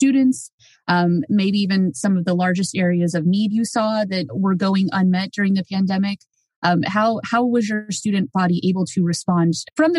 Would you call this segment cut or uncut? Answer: cut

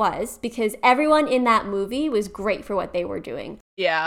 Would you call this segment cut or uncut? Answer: uncut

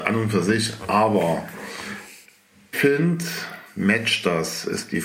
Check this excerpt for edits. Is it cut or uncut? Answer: cut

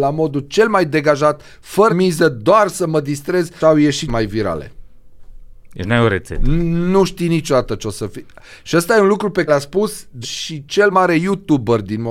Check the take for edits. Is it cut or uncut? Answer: cut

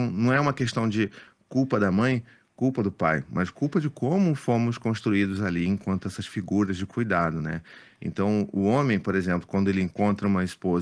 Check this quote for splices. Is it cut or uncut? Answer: uncut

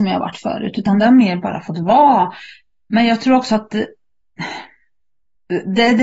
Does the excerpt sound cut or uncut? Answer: uncut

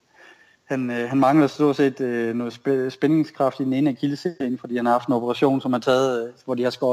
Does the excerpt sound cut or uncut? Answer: uncut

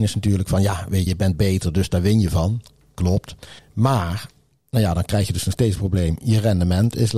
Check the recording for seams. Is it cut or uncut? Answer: cut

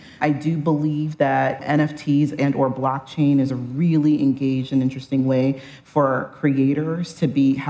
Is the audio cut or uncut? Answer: uncut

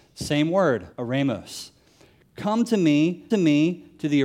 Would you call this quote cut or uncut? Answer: cut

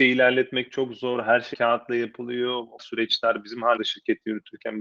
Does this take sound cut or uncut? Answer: cut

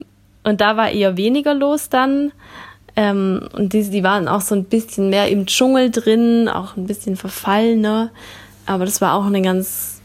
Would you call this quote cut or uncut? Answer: uncut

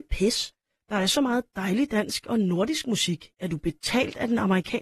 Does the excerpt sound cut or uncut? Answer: uncut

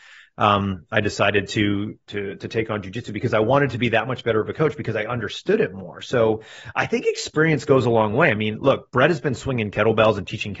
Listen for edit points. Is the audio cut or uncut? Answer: uncut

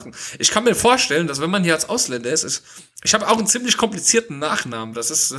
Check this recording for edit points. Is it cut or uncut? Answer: uncut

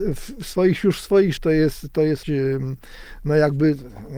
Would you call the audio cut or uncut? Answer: cut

